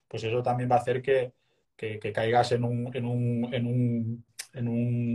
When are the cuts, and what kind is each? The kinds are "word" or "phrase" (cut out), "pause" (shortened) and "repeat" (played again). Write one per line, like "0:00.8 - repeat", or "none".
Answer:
none